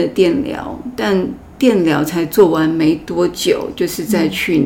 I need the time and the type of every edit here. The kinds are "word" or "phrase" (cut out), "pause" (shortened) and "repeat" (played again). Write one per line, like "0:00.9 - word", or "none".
none